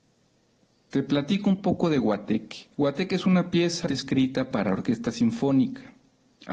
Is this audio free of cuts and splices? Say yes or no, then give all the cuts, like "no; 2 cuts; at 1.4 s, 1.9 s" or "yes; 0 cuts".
no; 2 cuts; at 2.7 s, 3.9 s